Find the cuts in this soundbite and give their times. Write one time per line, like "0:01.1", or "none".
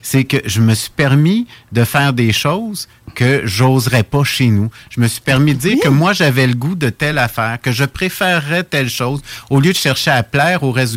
none